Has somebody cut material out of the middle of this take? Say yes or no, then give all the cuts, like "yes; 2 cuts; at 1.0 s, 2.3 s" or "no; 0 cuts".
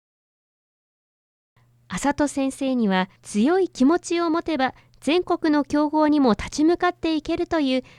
yes; 1 cut; at 3.2 s